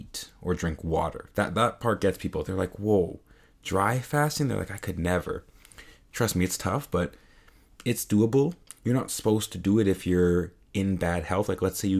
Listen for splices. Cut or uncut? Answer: uncut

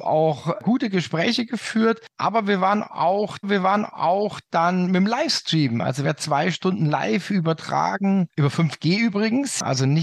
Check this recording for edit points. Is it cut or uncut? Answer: cut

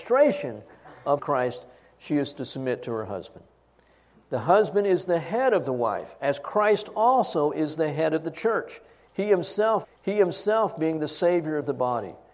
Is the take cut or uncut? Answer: cut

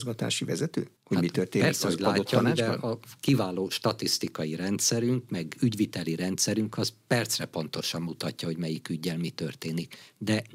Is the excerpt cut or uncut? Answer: cut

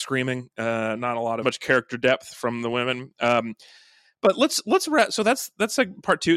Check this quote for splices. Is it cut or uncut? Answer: cut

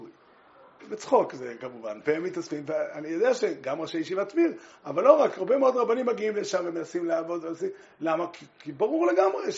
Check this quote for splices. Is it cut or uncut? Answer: uncut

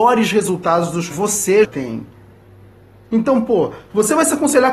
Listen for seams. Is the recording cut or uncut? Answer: cut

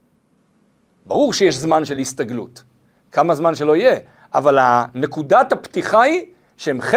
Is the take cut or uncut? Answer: uncut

